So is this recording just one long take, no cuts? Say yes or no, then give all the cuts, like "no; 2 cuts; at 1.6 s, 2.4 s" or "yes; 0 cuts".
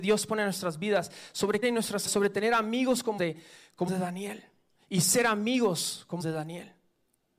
no; 5 cuts; at 1.6 s, 2.1 s, 3.2 s, 3.9 s, 6.2 s